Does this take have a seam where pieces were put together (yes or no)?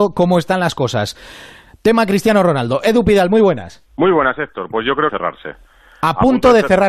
yes